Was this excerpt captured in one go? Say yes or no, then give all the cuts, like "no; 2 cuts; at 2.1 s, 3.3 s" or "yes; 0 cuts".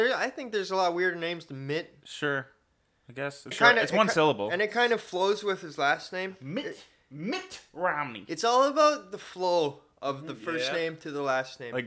no; 1 cut; at 3.5 s